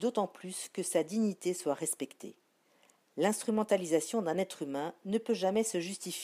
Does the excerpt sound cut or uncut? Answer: uncut